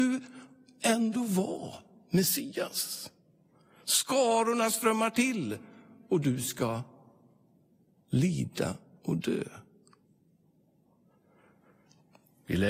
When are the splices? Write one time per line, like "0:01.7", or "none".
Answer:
none